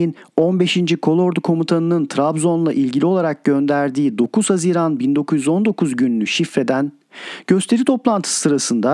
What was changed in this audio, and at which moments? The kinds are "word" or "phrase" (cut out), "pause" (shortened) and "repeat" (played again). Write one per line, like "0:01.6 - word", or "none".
none